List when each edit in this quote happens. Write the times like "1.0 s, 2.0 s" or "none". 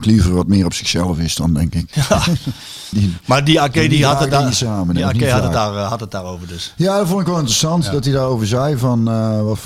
2.9 s